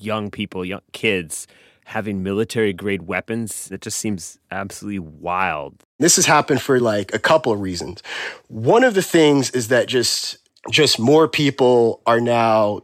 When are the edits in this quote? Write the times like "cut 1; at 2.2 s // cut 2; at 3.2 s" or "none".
none